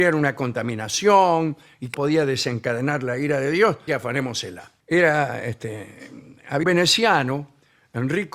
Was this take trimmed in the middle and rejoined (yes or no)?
yes